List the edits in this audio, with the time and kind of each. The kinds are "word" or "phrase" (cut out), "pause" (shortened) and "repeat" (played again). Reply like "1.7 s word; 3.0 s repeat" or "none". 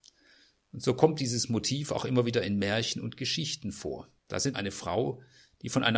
4.2 s pause; 4.5 s phrase